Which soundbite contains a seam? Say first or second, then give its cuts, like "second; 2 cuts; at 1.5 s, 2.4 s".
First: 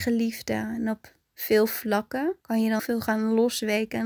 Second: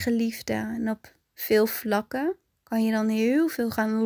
first; 2 cuts; at 2.4 s, 2.8 s